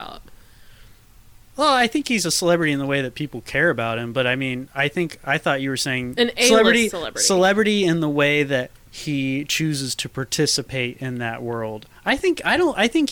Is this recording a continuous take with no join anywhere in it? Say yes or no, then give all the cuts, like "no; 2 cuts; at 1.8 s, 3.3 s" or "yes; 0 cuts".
yes; 0 cuts